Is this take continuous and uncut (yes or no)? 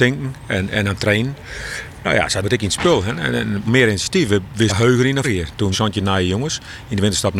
no